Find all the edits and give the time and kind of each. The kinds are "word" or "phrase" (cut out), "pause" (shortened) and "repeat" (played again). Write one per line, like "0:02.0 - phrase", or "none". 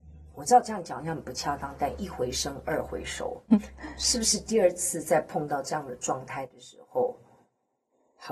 0:03.5 - word